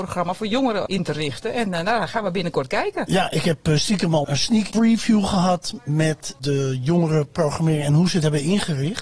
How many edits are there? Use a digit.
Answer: 1